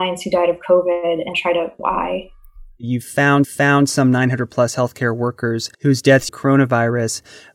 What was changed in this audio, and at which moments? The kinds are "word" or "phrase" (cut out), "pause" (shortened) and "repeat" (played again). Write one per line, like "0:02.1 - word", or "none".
0:01.3 - word
0:01.8 - word
0:03.4 - repeat
0:05.7 - pause
0:06.3 - phrase